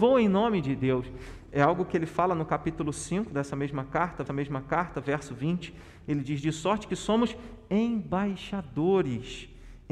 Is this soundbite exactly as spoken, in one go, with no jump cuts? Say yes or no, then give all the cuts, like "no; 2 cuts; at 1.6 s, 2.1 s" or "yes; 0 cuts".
no; 1 cut; at 4.3 s